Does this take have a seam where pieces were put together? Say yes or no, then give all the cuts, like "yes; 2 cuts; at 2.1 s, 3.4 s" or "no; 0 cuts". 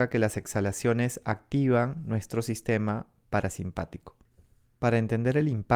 no; 0 cuts